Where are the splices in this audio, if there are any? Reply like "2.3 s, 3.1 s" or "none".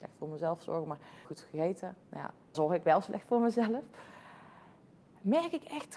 1.2 s, 2.0 s, 2.5 s